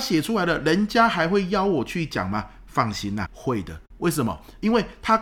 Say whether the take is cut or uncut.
cut